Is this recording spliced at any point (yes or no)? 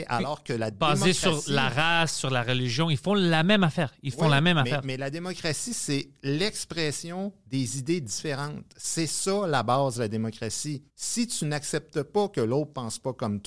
yes